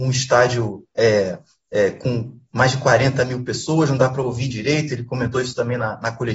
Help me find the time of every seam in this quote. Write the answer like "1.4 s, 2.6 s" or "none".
4.5 s